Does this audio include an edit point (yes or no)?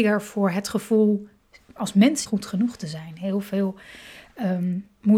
yes